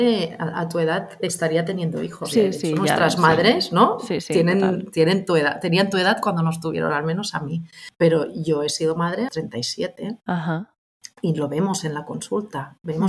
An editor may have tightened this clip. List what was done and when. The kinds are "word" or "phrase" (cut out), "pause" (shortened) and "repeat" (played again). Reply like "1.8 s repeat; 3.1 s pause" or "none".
9.3 s word